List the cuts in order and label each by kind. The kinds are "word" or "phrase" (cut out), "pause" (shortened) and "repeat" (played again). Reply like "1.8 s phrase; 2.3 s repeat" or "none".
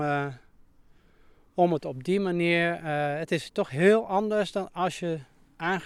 none